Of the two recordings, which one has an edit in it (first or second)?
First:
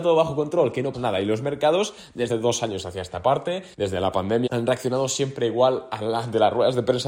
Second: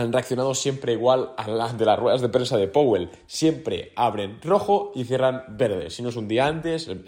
first